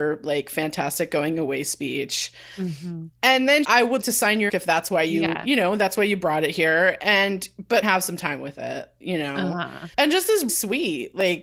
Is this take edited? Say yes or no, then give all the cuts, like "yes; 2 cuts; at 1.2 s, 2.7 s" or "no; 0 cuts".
yes; 6 cuts; at 3.6 s, 4.0 s, 4.5 s, 7.8 s, 9.9 s, 10.5 s